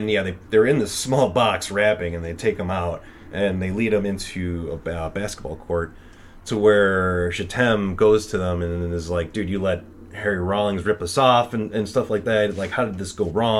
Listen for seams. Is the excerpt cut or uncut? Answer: uncut